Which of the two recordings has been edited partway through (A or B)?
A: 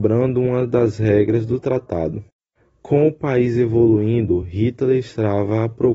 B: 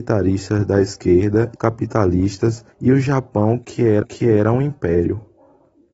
B